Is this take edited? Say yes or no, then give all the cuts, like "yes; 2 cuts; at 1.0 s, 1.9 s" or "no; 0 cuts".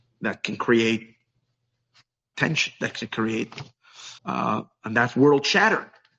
yes; 2 cuts; at 2.3 s, 4.2 s